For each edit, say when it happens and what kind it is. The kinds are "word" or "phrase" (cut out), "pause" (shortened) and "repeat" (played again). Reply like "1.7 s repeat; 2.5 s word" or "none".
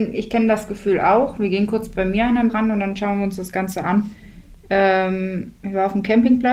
2.5 s word

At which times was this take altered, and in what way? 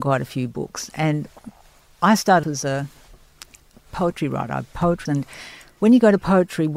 2.4 s word; 5.1 s word

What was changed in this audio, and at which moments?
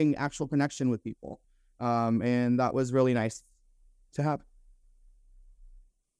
none

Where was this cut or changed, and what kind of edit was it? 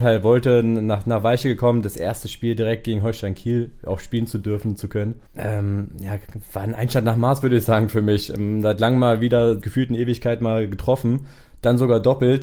5.3 s pause; 9.6 s word

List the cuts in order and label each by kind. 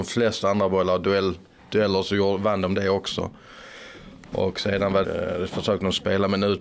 5.0 s word

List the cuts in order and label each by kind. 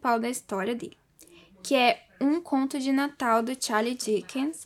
none

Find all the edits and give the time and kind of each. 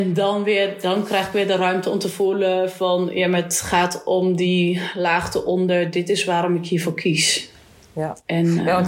none

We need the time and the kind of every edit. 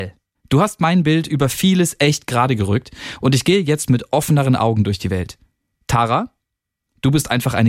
none

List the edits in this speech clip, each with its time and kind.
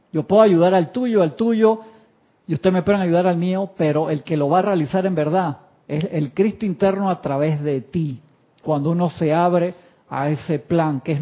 none

